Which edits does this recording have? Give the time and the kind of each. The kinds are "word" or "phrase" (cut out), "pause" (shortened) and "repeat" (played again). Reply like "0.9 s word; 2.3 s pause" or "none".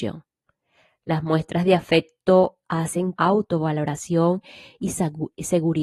3.2 s phrase